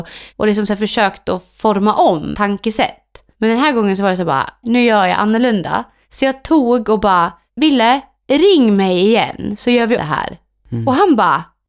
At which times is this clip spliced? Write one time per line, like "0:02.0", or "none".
0:02.3
0:04.6
0:10.0